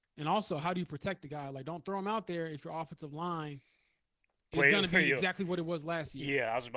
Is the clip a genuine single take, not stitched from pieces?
yes; 0 cuts

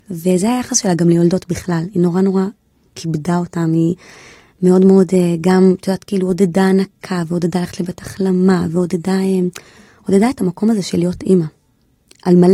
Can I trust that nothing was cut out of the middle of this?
yes; 0 cuts

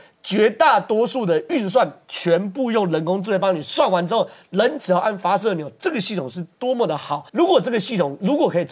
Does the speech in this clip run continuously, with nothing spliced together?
no; 1 cut; at 7.3 s

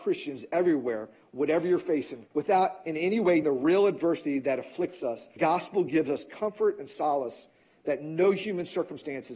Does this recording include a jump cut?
yes; 3 cuts; at 2.3 s, 3.4 s, 5.4 s

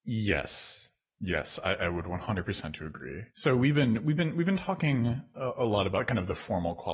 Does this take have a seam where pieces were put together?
yes; 1 cut; at 3.3 s

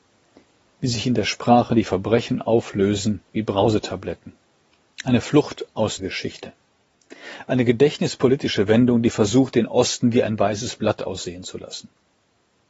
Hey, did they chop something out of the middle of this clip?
yes; 2 cuts; at 3.3 s, 6.0 s

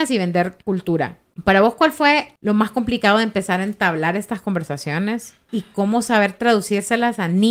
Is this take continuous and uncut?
yes; 0 cuts

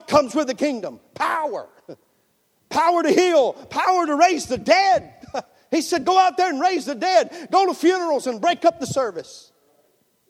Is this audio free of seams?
yes; 0 cuts

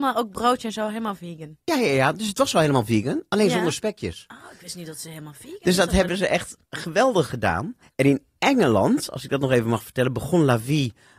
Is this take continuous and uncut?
no; 2 cuts; at 1.6 s, 7.8 s

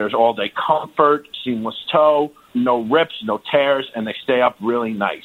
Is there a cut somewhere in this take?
yes; 1 cut; at 2.5 s

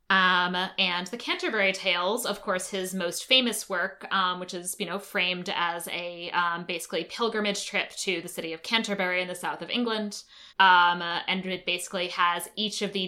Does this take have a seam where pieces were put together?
yes; 1 cut; at 10.5 s

